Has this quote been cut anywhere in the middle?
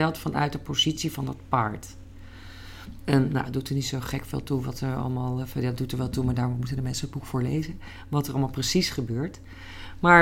no; 0 cuts

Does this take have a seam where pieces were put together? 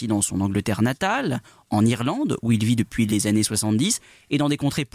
no; 0 cuts

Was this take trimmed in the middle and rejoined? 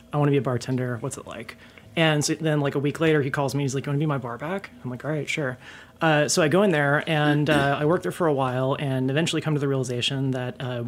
no; 0 cuts

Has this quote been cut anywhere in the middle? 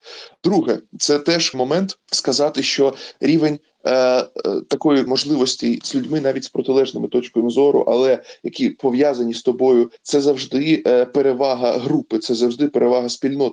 yes; 5 cuts; at 1.5 s, 2.0 s, 5.1 s, 5.8 s, 10.0 s

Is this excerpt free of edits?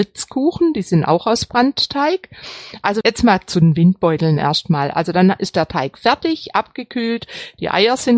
no; 1 cut; at 3.0 s

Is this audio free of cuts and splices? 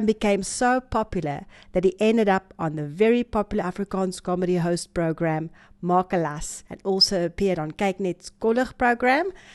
no; 1 cut; at 6.7 s

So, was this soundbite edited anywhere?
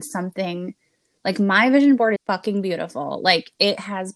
yes; 1 cut; at 2.2 s

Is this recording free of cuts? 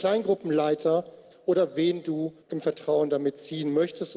no; 1 cut; at 2.4 s

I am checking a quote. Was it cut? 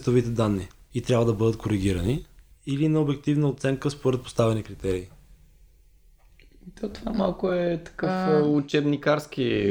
no; 0 cuts

